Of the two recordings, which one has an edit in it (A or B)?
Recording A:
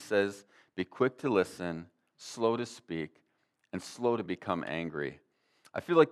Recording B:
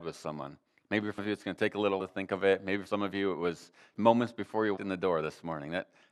B